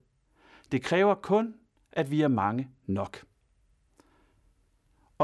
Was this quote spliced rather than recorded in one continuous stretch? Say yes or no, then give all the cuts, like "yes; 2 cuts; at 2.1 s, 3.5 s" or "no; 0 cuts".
no; 0 cuts